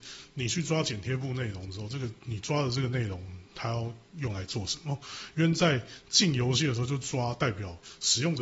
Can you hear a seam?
yes; 1 cut; at 2.2 s

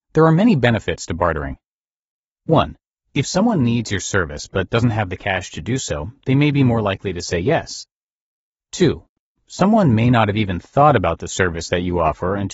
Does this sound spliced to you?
no; 0 cuts

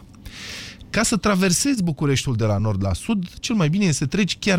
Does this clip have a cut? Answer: no; 0 cuts

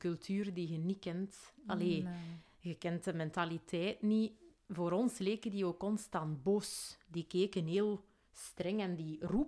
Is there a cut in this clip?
no; 0 cuts

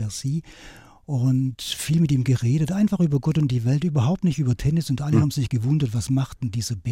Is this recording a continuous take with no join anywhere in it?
yes; 0 cuts

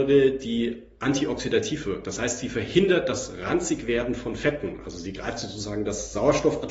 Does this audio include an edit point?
no; 0 cuts

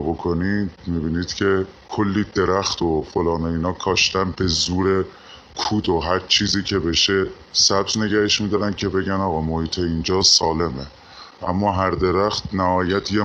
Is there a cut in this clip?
no; 0 cuts

